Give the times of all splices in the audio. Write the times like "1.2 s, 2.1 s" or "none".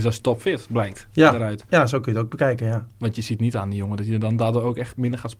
none